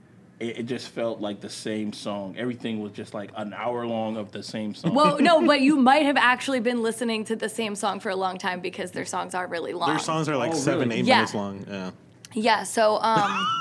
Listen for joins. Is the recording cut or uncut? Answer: uncut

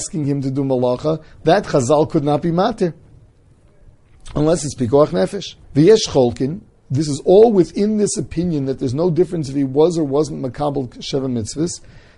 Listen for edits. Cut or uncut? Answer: cut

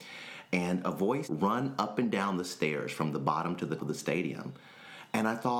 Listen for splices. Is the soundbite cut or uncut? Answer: cut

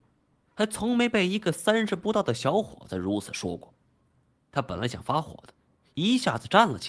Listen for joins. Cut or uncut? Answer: uncut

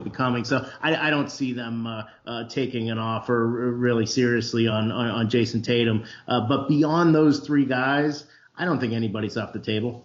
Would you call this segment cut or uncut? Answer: uncut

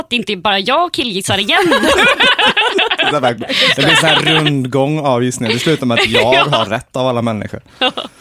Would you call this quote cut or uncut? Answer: uncut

